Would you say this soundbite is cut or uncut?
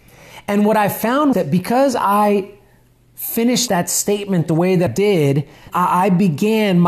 cut